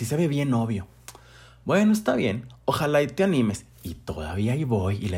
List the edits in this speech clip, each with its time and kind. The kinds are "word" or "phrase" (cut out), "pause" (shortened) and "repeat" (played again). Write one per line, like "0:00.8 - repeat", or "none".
none